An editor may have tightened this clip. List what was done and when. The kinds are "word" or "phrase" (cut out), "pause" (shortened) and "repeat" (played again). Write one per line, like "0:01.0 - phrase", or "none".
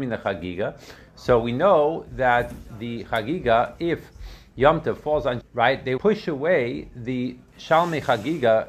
0:05.4 - word
0:06.0 - word